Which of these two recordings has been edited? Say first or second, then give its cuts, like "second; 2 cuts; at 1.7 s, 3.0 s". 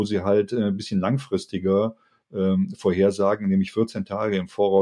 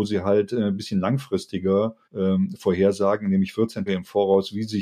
second; 2 cuts; at 2.0 s, 3.9 s